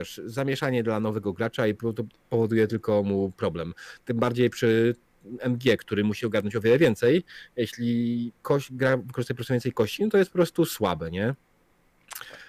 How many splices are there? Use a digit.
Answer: 1